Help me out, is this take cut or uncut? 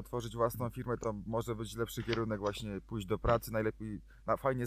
uncut